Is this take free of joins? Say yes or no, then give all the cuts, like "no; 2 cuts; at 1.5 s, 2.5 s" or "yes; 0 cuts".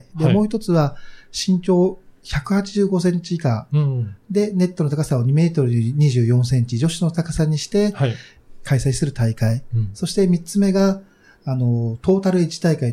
yes; 0 cuts